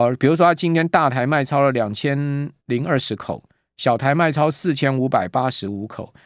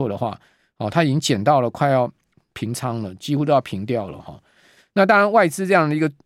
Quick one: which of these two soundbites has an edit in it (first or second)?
first